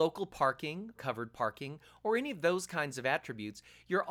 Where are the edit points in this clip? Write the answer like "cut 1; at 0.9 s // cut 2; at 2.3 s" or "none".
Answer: cut 1; at 1.0 s